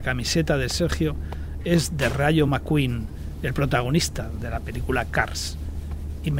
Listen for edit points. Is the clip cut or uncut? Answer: uncut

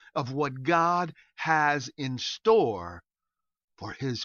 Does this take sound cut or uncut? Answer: uncut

